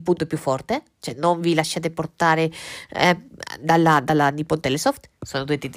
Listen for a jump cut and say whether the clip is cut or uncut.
uncut